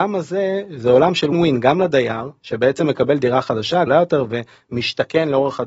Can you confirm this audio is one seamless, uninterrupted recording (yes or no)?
no